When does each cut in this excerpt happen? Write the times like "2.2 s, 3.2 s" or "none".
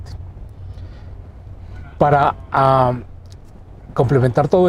none